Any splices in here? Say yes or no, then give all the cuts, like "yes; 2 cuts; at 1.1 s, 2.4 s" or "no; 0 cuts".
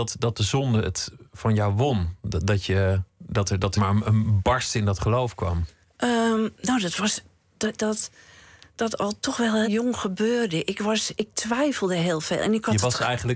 yes; 5 cuts; at 3.1 s, 3.8 s, 5.8 s, 7.8 s, 9.6 s